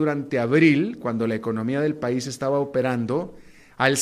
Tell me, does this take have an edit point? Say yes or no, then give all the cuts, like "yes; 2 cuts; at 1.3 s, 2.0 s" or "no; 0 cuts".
no; 0 cuts